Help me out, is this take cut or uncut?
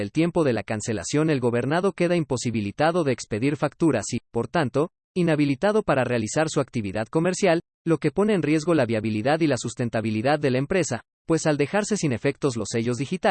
uncut